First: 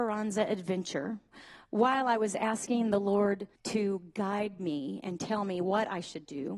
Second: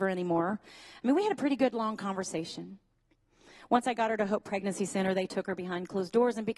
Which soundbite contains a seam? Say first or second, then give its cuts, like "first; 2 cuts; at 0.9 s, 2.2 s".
first; 1 cut; at 3.6 s